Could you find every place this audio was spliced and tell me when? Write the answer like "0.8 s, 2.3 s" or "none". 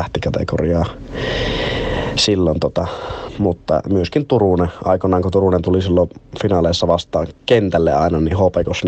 none